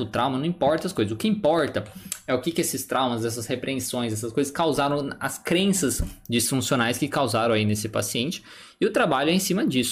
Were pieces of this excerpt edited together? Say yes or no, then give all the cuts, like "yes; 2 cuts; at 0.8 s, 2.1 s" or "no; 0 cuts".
no; 0 cuts